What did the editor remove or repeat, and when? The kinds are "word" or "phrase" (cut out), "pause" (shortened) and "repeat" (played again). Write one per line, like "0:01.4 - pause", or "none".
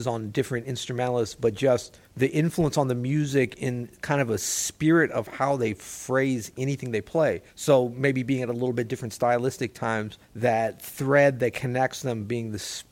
0:02.1 - pause
0:07.5 - pause
0:10.2 - pause

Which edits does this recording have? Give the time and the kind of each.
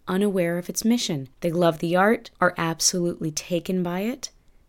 0:01.3 - pause
0:02.3 - pause

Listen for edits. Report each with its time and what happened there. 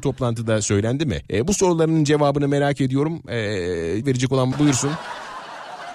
0:01.3 - pause
0:04.0 - word
0:04.5 - word

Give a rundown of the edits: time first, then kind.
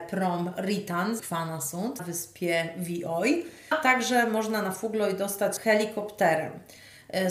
0:01.2 - word
0:02.0 - word
0:03.7 - word
0:05.6 - word

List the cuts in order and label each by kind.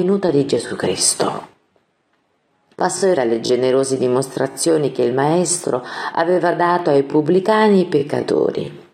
0:03.2 - word

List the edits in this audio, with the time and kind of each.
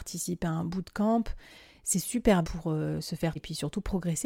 0:02.4 - word
0:03.4 - word

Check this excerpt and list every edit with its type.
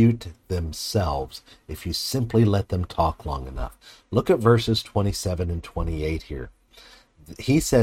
none

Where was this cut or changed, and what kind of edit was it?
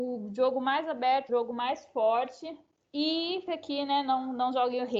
0:01.3 - word
0:03.5 - word

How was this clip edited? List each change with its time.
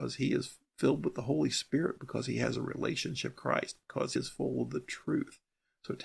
0:03.4 - word
0:04.2 - word

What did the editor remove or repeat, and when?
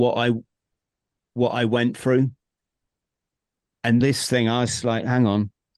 0:04.0 - phrase

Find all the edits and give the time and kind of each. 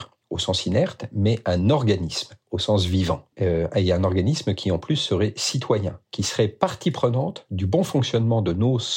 0:03.3 - pause
0:06.1 - pause

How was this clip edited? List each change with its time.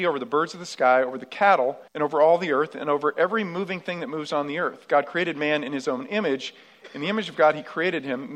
0:01.9 - pause

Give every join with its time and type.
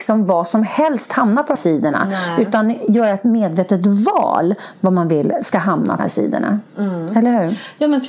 0:01.5 - word
0:06.0 - word

